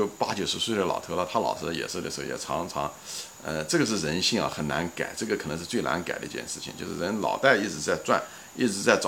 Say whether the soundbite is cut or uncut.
uncut